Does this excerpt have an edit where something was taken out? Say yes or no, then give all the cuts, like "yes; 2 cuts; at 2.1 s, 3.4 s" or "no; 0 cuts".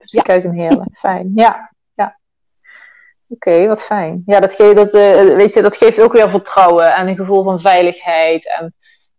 no; 0 cuts